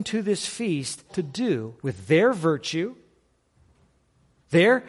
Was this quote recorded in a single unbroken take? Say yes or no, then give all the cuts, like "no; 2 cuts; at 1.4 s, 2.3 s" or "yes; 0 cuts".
no; 2 cuts; at 1.1 s, 1.8 s